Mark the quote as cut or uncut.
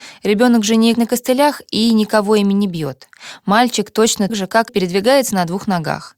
cut